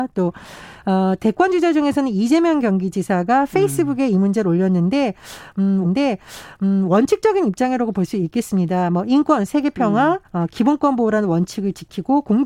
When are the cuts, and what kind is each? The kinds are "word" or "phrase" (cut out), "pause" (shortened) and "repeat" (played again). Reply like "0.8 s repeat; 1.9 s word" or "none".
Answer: 5.8 s repeat; 10.2 s pause